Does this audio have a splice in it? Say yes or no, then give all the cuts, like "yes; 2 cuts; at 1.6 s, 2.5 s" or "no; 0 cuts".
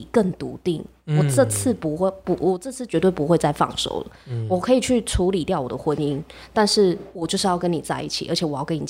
no; 0 cuts